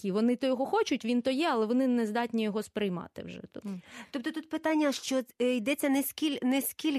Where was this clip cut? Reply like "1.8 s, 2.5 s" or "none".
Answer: none